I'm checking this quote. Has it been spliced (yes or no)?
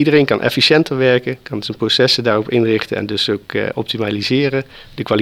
no